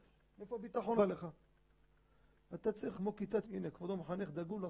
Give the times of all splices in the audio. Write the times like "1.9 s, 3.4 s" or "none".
1.0 s, 2.9 s, 3.4 s